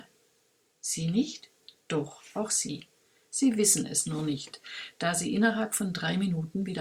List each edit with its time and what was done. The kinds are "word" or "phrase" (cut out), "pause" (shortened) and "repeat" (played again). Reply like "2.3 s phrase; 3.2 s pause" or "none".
1.8 s pause